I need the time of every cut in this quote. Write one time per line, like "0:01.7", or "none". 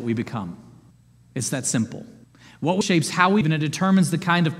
0:00.9
0:02.2
0:02.8
0:03.4

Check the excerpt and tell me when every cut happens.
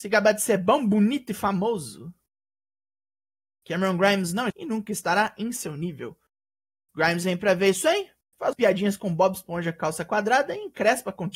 0:04.5
0:08.5

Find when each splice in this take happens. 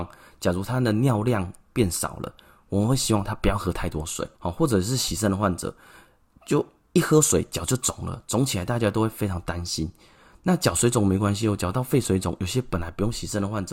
0:04.3

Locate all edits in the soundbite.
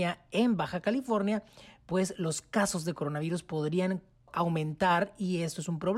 none

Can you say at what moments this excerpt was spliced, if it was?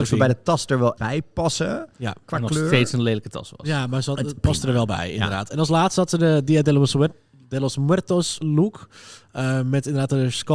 0:01.0
0:08.4

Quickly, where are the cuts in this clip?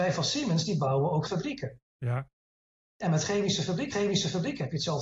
0:01.3
0:01.9
0:03.9

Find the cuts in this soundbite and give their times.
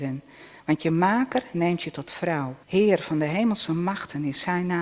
0:02.6

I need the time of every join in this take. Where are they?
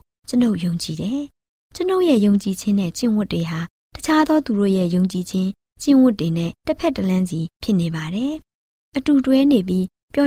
0:06.6
0:07.5

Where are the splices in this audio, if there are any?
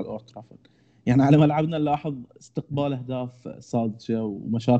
none

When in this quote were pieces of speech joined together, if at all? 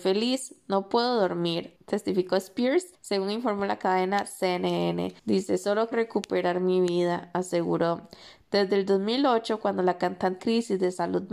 0:01.8
0:02.9
0:05.2
0:05.9
0:10.4

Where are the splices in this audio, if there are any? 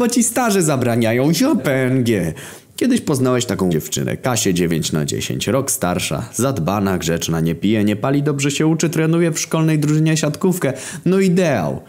0:01.6
0:03.7

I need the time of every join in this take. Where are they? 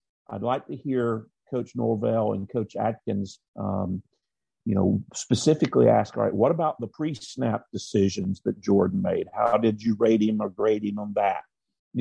0:03.5
0:06.9

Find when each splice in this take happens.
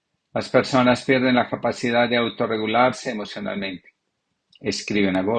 none

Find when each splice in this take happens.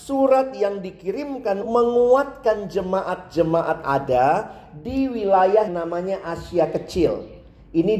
0:01.6
0:03.8
0:05.7

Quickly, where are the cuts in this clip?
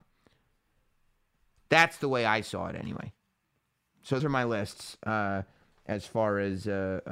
0:04.2

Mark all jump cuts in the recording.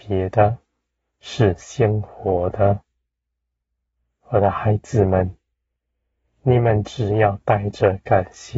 0:01.1

